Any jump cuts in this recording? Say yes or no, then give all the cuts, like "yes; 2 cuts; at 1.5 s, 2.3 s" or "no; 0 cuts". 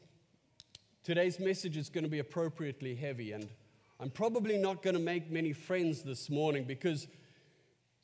no; 0 cuts